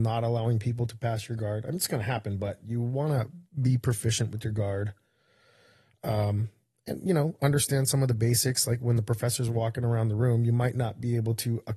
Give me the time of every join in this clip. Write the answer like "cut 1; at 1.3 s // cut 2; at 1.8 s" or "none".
none

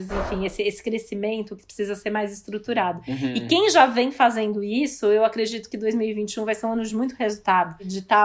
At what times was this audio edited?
none

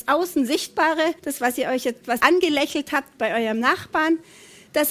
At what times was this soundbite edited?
cut 1; at 1.2 s // cut 2; at 2.2 s

